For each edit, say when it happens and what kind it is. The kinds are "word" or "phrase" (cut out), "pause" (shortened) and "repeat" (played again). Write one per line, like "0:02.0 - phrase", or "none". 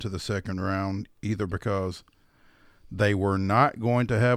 none